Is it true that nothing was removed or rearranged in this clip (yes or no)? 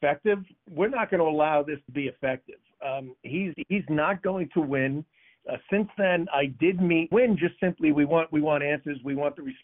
no